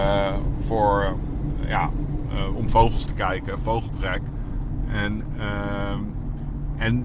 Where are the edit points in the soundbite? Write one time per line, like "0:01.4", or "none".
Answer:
0:03.6

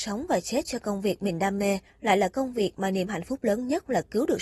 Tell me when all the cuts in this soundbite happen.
none

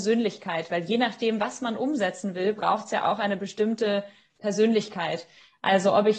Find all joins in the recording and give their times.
none

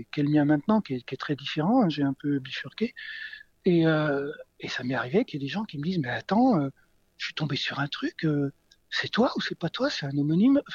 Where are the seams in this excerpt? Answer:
none

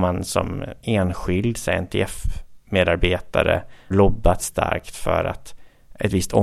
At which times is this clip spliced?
0:03.9
0:04.4

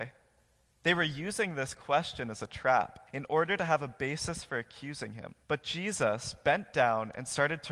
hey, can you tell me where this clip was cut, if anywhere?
0:03.1
0:05.4

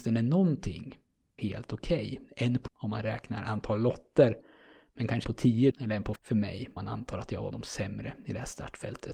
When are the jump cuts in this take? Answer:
0:01.4
0:02.7
0:05.2
0:05.7
0:06.2
0:06.8
0:07.5

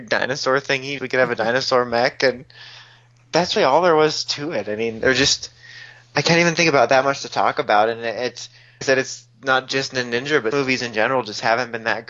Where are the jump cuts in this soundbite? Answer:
0:01.0
0:03.6
0:08.8
0:10.5

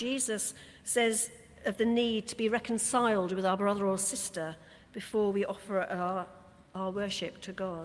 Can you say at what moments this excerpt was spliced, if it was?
none

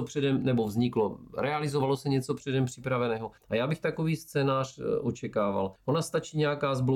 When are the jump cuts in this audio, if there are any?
0:03.4
0:05.8

